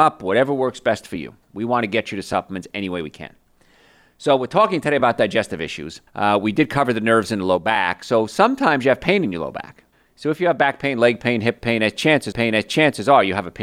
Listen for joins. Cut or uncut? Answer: cut